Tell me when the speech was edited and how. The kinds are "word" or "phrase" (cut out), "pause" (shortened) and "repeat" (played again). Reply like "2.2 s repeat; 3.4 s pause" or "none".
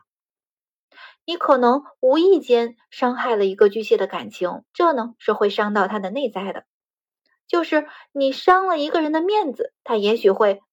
4.7 s pause; 9.8 s pause